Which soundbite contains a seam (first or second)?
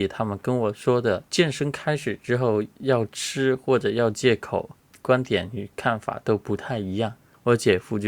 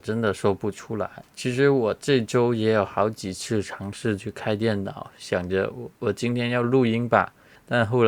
second